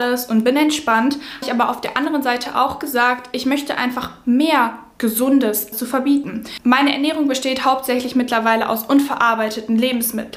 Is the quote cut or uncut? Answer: cut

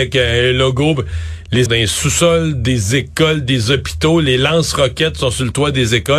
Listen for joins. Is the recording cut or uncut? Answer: cut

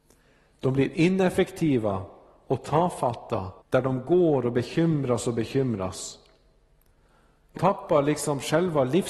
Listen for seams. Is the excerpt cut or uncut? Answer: cut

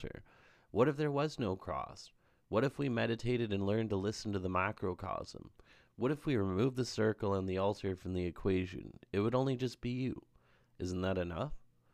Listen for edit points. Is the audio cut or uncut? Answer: uncut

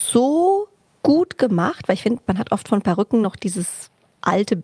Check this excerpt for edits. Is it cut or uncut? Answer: uncut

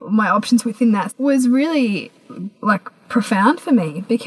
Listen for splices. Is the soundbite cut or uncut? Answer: cut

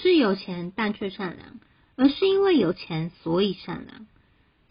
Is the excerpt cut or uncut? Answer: uncut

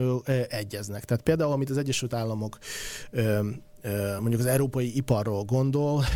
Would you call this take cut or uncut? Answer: uncut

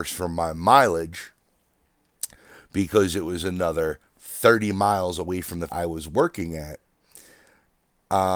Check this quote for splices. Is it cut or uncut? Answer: cut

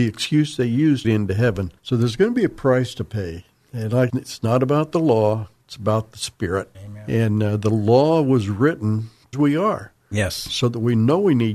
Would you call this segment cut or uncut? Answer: cut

